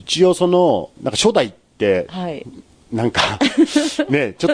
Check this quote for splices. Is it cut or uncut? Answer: cut